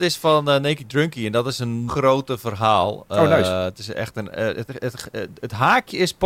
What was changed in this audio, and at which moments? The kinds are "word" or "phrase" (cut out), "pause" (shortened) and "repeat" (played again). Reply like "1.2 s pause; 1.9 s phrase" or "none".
1.9 s word